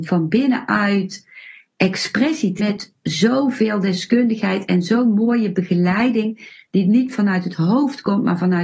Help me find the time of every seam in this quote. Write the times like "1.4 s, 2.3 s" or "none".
2.6 s